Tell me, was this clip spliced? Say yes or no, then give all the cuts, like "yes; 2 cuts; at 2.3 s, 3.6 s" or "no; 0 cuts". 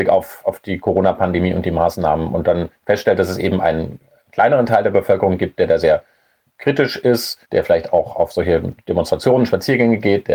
yes; 2 cuts; at 6.5 s, 7.4 s